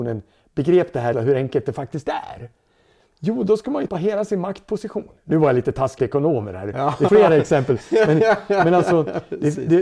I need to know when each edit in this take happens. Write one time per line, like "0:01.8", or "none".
0:01.1
0:03.9
0:06.0
0:07.1